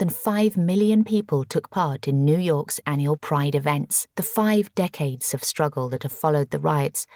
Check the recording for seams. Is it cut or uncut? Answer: cut